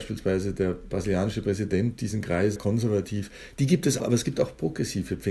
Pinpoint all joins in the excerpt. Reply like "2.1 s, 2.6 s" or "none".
2.6 s, 4.0 s